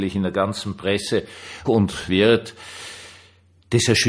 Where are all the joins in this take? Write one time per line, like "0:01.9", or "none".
0:01.6
0:02.1